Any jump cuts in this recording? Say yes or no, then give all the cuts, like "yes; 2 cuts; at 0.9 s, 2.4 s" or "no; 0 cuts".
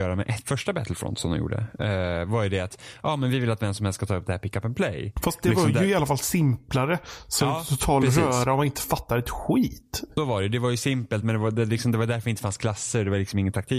no; 0 cuts